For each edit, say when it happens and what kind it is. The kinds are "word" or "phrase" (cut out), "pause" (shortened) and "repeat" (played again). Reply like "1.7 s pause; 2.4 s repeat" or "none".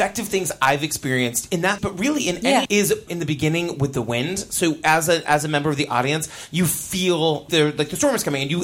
1.8 s word; 2.7 s word; 3.1 s word; 7.5 s word